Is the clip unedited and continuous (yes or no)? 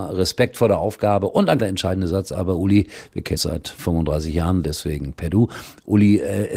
no